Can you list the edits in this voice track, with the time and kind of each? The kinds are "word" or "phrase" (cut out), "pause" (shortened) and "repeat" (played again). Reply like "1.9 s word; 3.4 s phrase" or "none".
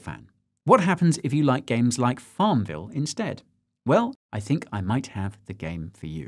4.2 s pause